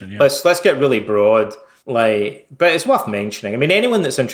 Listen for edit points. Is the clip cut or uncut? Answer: uncut